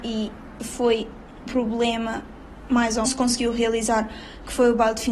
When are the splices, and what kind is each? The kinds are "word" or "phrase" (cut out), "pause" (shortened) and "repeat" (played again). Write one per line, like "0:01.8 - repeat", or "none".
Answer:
0:01.5 - word
0:03.1 - phrase